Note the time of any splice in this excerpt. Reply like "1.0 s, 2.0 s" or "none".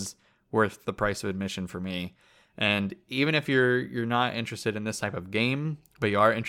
none